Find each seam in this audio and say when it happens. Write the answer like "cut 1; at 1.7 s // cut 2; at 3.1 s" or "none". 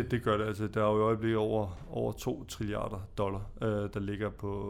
none